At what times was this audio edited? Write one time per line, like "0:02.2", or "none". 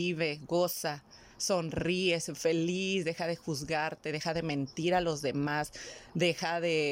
none